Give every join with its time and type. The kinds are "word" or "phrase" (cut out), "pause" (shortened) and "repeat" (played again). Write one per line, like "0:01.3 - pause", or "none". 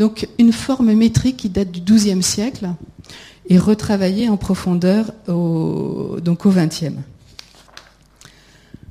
none